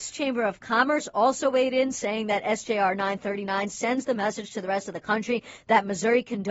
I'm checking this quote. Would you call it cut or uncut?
uncut